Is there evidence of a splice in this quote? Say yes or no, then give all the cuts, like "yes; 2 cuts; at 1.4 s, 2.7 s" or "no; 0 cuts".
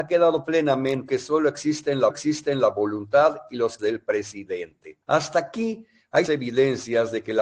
yes; 5 cuts; at 1.1 s, 2.1 s, 3.8 s, 5.0 s, 6.3 s